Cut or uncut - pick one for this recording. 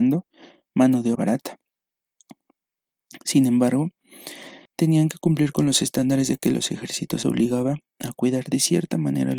cut